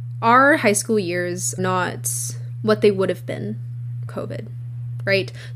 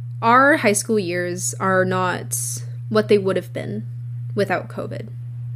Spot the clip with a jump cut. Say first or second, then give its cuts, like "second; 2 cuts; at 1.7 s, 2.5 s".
first; 2 cuts; at 1.6 s, 4.1 s